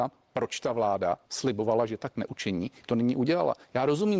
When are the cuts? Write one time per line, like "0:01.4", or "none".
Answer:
0:01.2
0:02.8